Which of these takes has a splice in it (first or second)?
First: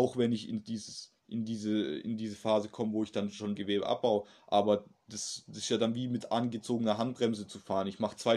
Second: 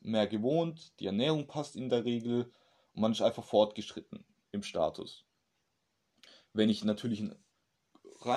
first